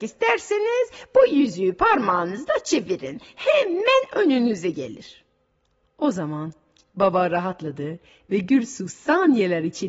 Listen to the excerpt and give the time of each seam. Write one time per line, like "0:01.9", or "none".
none